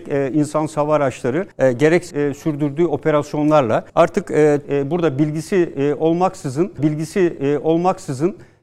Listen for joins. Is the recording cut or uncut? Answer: cut